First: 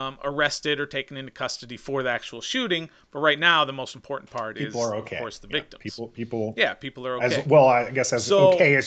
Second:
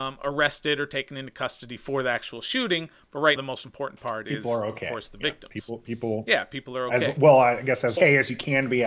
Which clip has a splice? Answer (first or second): second